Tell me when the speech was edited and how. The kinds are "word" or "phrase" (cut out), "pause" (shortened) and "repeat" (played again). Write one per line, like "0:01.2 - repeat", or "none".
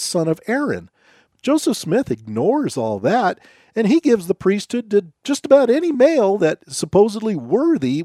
none